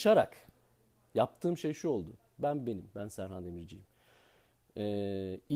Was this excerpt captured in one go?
yes; 0 cuts

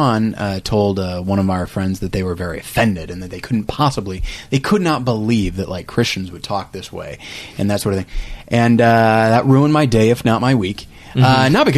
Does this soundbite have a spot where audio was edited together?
no; 0 cuts

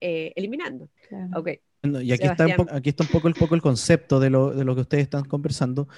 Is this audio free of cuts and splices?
no; 3 cuts; at 1.0 s, 2.7 s, 3.3 s

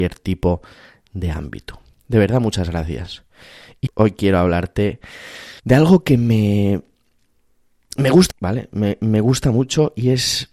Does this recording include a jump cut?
yes; 3 cuts; at 3.9 s, 5.6 s, 8.3 s

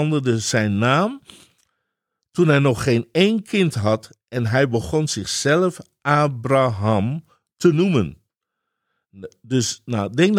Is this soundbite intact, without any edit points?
yes; 0 cuts

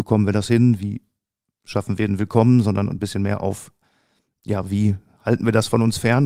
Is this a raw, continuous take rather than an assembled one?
yes; 0 cuts

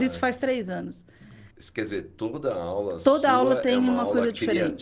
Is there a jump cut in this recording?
yes; 1 cut; at 1.5 s

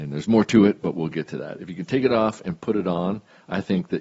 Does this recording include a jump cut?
no; 0 cuts

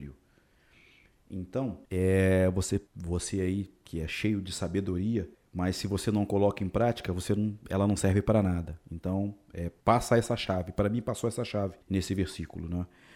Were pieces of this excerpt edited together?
yes; 5 cuts; at 1.8 s, 2.9 s, 5.3 s, 9.8 s, 11.8 s

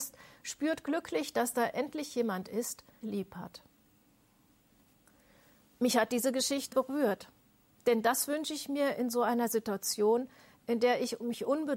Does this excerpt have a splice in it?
yes; 2 cuts; at 3.0 s, 6.7 s

